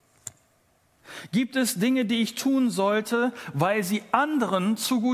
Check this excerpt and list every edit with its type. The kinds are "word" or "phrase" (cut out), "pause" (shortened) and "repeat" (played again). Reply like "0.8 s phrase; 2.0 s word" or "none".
none